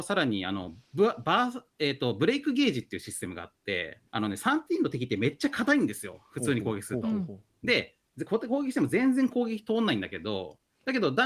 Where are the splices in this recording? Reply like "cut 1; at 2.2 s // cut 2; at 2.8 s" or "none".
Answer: cut 1; at 1.7 s // cut 2; at 4.1 s

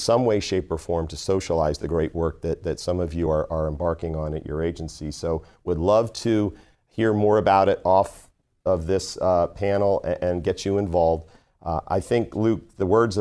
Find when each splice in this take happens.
none

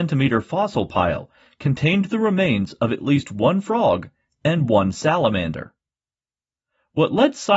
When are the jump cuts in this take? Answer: none

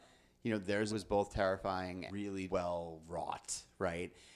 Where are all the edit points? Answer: cut 1; at 0.9 s // cut 2; at 2.1 s // cut 3; at 2.5 s

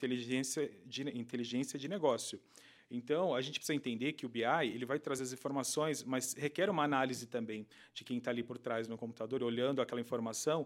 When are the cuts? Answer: none

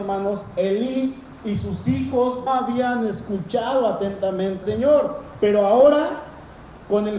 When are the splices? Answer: cut 1; at 2.5 s // cut 2; at 4.6 s

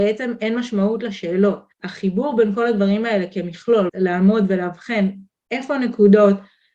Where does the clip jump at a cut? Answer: cut 1; at 1.7 s // cut 2; at 3.9 s

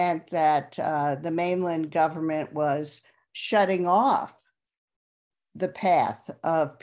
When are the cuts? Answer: none

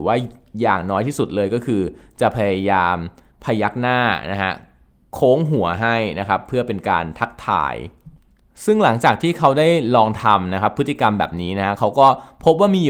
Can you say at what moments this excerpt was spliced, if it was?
none

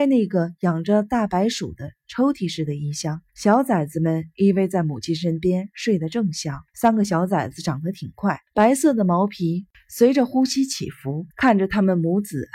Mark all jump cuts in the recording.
cut 1; at 3.3 s // cut 2; at 6.7 s // cut 3; at 8.5 s // cut 4; at 11.3 s

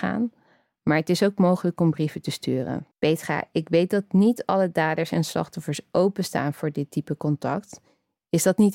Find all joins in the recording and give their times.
cut 1; at 2.9 s

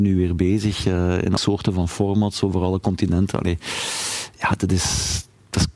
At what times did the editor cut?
cut 1; at 1.4 s

